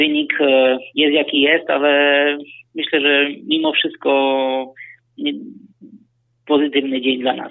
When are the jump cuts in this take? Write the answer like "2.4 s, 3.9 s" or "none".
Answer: none